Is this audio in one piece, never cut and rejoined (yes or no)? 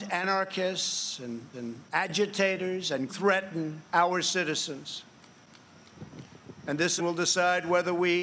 no